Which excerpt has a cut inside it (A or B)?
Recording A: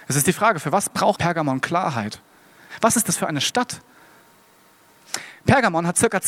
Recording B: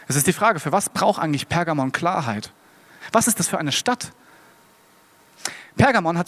A